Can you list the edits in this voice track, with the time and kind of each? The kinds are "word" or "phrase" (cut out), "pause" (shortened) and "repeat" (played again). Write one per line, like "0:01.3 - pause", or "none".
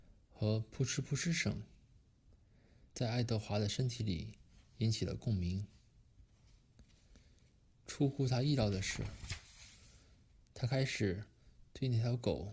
0:02.9 - pause

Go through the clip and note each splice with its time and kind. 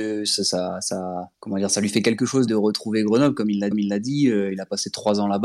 0:01.3 - pause
0:02.5 - word
0:03.7 - repeat

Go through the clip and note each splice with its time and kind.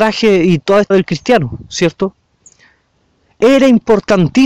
0:00.9 - word

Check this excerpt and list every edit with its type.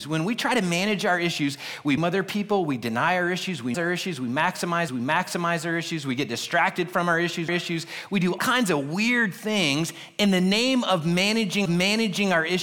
0:02.0 - word
0:03.7 - word
0:04.9 - repeat
0:07.5 - phrase
0:08.4 - word
0:11.7 - repeat

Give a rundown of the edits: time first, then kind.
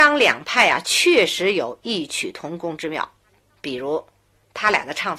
none

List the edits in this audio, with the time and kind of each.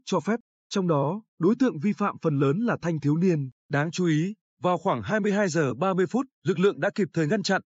0:01.3 - pause
0:03.6 - pause
0:06.3 - pause

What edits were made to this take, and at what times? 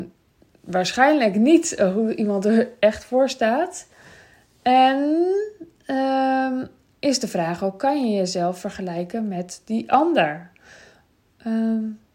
none

